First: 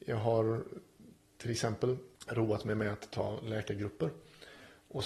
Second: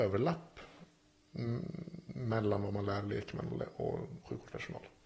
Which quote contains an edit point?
first; 1 cut; at 2.2 s

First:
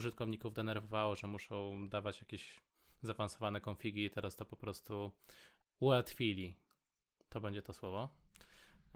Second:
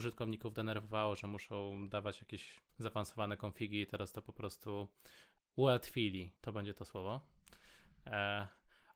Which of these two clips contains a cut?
second; 2 cuts; at 2.7 s, 6.4 s

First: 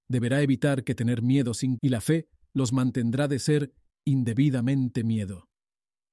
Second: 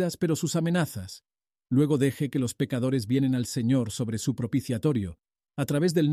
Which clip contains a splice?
first; 1 cut; at 1.8 s

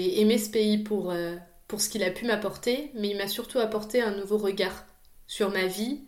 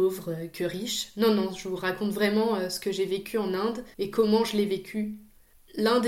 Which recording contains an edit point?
second; 1 cut; at 3.9 s

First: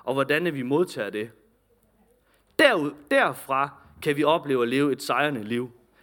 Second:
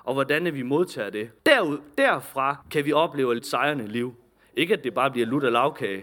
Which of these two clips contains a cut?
second; 3 cuts; at 1.4 s, 2.6 s, 3.4 s

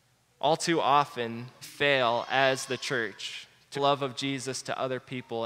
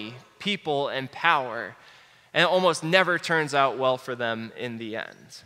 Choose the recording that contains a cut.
first; 2 cuts; at 1.6 s, 3.7 s

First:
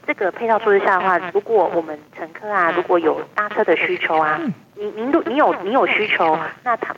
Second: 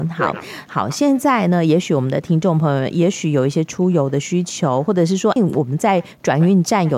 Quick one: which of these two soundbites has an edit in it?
second; 1 cut; at 5.4 s

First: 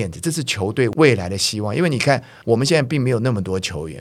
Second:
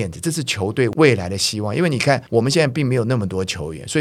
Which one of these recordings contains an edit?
second; 1 cut; at 2.3 s

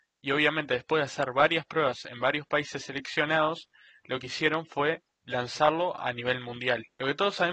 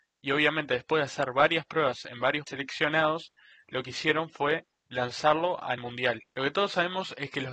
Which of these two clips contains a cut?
second; 2 cuts; at 2.5 s, 5.8 s

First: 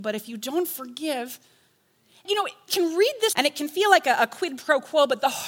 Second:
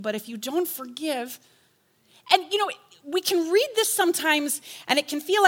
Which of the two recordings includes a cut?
first; 3 cuts; at 2.2 s, 2.7 s, 3.3 s

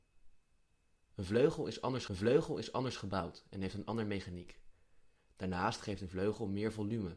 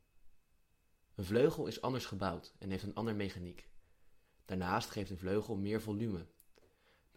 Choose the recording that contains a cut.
first; 1 cut; at 2.1 s

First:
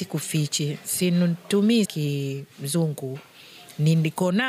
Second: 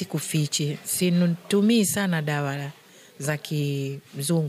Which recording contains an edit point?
first; 1 cut; at 1.8 s

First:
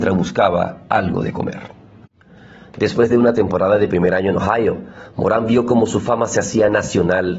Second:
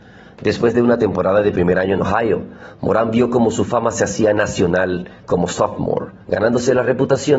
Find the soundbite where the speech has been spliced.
second; 1 cut; at 6.2 s

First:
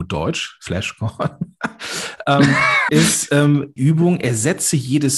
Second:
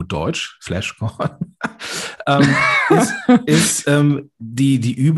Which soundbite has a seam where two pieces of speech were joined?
first; 2 cuts; at 2.9 s, 3.8 s

